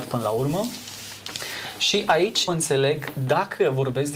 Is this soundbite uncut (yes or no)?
no